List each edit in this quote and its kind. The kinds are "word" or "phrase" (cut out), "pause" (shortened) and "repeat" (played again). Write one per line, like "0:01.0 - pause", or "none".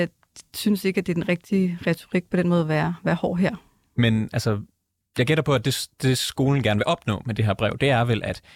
none